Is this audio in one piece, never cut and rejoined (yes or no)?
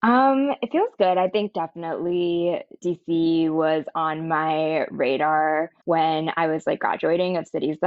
no